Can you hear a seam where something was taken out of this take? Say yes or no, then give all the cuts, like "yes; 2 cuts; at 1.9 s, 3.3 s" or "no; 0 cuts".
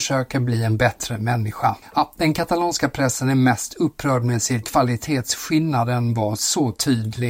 yes; 1 cut; at 4.6 s